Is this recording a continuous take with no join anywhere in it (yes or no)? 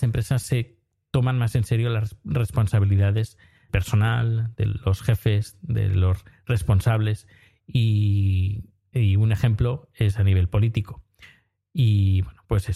no